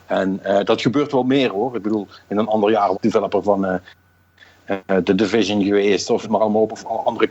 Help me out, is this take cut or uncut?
cut